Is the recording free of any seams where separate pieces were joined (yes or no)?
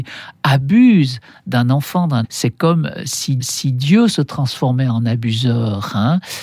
no